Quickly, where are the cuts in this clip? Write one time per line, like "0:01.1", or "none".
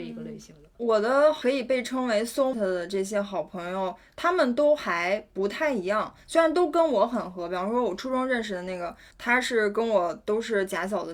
0:02.5